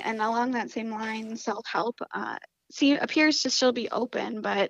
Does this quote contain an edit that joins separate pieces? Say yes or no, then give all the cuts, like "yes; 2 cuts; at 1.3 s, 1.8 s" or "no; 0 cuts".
no; 0 cuts